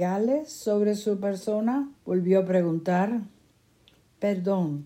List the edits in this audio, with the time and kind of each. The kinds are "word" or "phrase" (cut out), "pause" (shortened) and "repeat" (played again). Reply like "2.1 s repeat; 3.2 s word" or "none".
2.0 s pause